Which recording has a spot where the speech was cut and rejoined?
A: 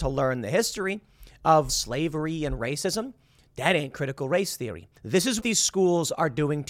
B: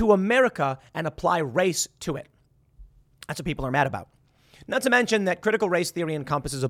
A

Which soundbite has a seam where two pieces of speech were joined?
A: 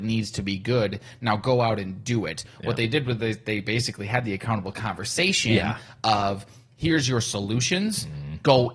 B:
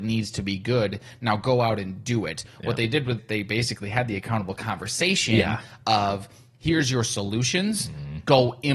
B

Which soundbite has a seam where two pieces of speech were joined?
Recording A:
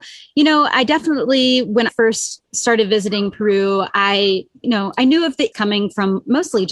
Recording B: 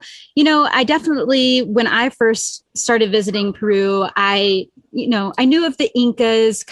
A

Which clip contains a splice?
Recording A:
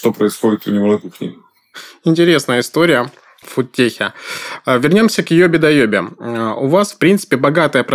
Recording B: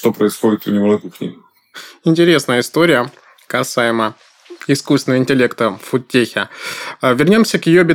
A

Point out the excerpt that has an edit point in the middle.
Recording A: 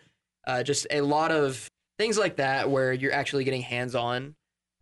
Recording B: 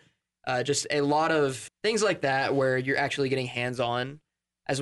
B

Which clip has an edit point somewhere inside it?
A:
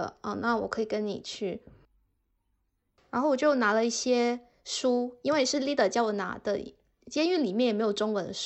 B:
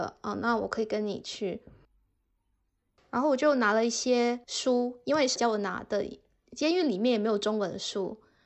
B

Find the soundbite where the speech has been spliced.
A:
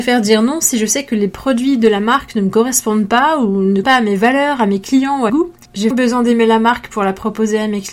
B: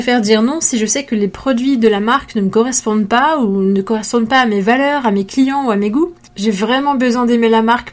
A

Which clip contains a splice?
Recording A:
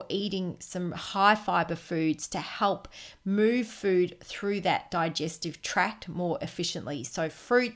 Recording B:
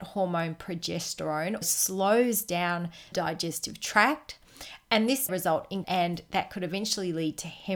B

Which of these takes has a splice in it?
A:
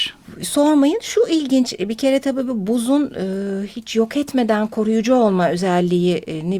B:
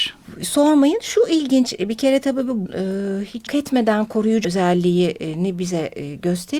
B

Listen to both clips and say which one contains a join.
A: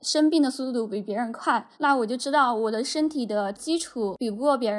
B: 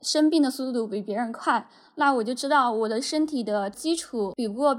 A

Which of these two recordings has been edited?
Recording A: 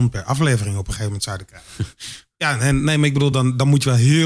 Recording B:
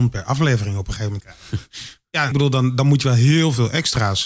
B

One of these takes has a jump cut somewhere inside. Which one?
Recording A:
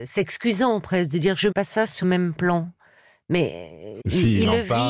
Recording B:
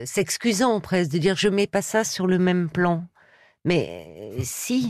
A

